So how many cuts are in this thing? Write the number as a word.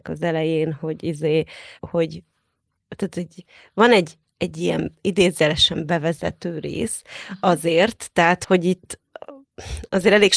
one